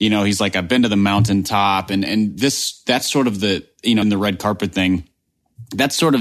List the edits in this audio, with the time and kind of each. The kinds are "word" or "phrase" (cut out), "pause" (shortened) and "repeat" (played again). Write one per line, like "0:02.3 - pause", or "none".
0:04.0 - word